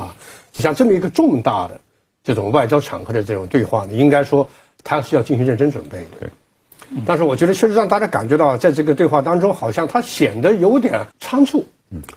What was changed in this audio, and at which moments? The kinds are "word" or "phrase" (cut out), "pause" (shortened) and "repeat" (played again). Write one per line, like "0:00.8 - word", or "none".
0:11.1 - pause